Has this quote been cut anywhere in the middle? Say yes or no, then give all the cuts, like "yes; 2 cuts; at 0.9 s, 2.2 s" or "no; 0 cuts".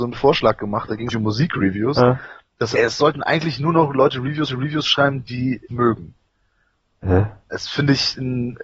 yes; 5 cuts; at 1.1 s, 2.7 s, 4.5 s, 5.7 s, 7.4 s